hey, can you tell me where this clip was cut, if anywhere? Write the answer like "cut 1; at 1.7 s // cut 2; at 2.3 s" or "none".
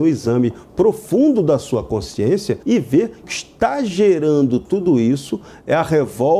cut 1; at 2.6 s // cut 2; at 3.2 s